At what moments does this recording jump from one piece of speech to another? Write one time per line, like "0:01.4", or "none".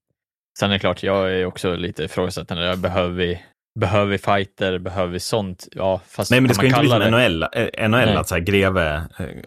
0:03.5